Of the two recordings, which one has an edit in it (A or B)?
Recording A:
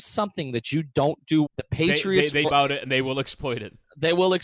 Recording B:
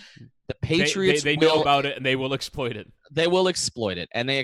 A